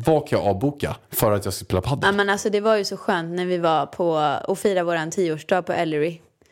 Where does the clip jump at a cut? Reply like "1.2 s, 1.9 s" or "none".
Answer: 1.0 s